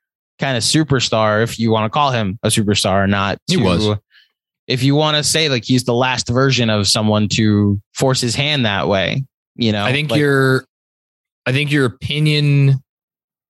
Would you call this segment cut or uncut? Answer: uncut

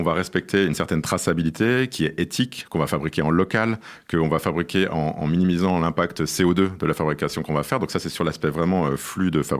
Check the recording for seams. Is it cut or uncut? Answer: uncut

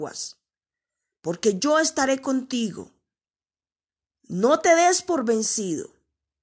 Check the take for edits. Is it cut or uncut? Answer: uncut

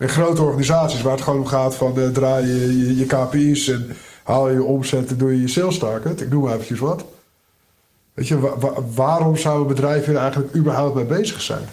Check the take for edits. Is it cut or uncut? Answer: uncut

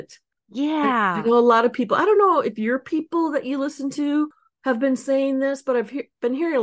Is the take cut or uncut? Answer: uncut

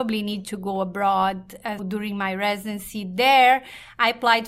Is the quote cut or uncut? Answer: cut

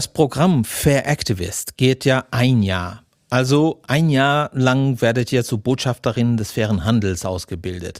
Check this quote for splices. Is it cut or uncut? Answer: uncut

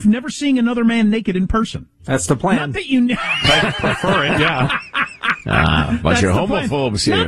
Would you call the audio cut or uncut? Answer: cut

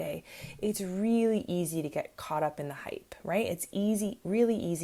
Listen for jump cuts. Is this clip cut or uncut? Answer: uncut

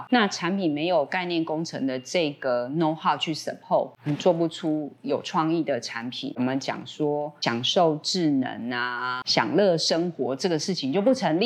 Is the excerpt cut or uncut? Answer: uncut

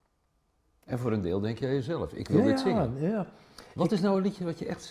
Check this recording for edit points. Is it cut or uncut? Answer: uncut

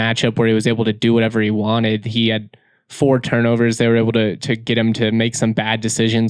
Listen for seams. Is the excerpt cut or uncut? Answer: uncut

